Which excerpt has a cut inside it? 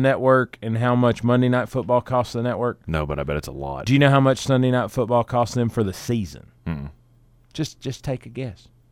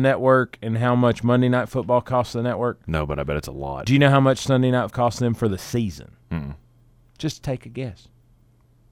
second; 2 cuts; at 4.9 s, 7.4 s

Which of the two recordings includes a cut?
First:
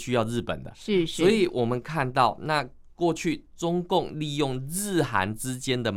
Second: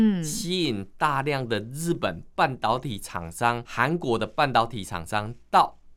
second; 1 cut; at 3.6 s

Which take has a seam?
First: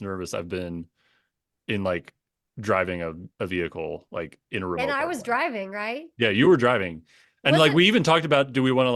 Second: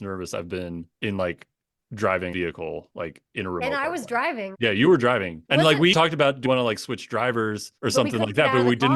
second; 7 cuts; at 0.9 s, 2.3 s, 4.5 s, 5.5 s, 5.9 s, 6.4 s, 7.8 s

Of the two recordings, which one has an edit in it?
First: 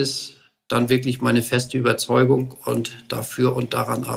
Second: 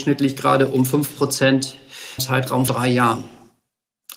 second; 2 cuts; at 2.2 s, 2.7 s

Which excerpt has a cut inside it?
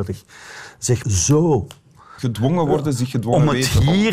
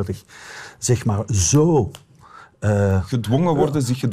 first; 2 cuts; at 1.0 s, 2.2 s

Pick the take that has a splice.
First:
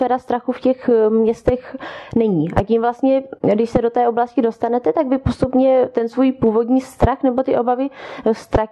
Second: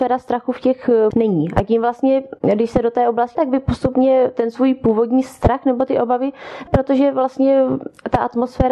second; 3 cuts; at 1.1 s, 3.4 s, 6.7 s

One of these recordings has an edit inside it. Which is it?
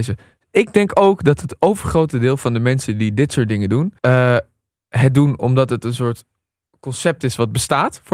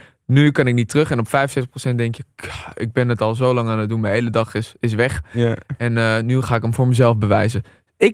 first; 1 cut; at 4.0 s

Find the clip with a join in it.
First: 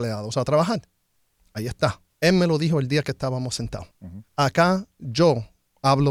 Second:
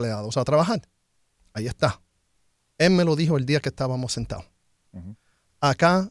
first; 3 cuts; at 2.1 s, 3.9 s, 4.3 s

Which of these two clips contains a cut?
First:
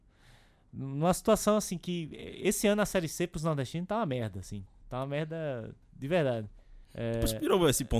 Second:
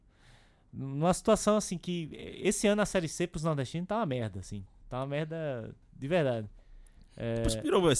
first; 1 cut; at 6.8 s

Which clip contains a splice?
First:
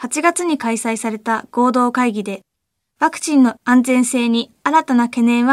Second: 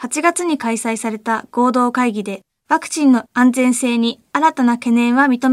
second; 1 cut; at 2.5 s

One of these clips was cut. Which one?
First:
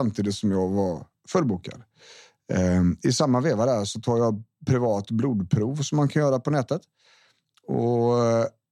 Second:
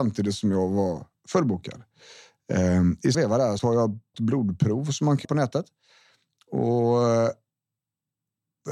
second; 4 cuts; at 3.1 s, 3.6 s, 4.1 s, 5.2 s

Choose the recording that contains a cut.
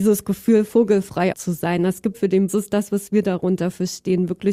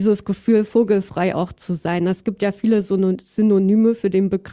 first; 3 cuts; at 1.3 s, 2.1 s, 2.5 s

